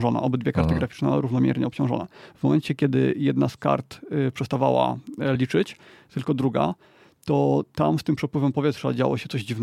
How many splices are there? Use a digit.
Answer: 0